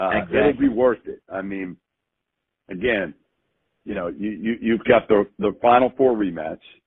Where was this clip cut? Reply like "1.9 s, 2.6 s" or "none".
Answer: none